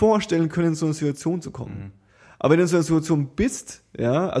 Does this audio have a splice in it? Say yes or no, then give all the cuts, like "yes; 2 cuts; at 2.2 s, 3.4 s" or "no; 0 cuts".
no; 0 cuts